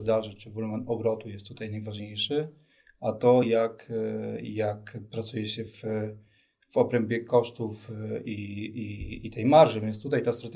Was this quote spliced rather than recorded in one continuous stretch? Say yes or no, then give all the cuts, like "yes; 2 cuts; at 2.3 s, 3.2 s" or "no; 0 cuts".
no; 0 cuts